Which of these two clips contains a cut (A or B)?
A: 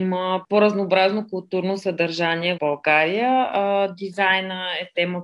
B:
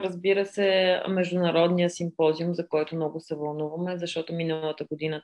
A